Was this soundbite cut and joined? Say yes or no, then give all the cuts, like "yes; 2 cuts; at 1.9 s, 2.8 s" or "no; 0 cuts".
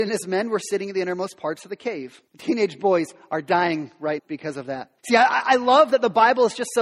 yes; 3 cuts; at 2.3 s, 4.2 s, 5.0 s